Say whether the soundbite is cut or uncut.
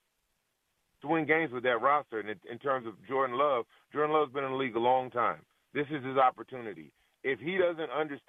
uncut